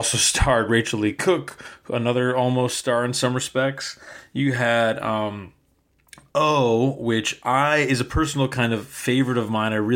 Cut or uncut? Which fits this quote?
uncut